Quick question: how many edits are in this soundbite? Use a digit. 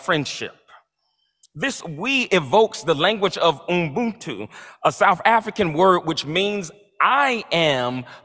0